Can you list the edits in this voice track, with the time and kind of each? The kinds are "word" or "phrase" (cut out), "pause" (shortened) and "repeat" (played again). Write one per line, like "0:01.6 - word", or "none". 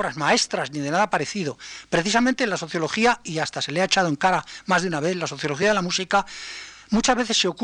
none